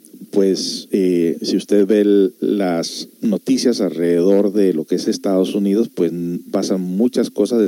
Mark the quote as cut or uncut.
uncut